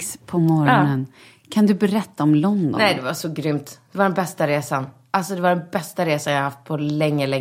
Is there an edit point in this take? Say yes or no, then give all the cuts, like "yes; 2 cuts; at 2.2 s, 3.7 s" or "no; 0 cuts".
no; 0 cuts